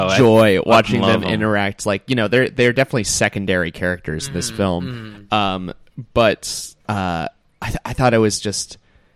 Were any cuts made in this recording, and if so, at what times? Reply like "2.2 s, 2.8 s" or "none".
6.8 s